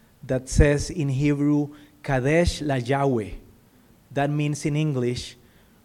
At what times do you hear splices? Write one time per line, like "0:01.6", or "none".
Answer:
none